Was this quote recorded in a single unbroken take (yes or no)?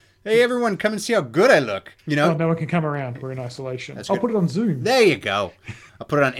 no